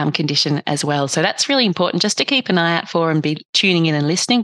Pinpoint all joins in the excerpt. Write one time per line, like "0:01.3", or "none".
none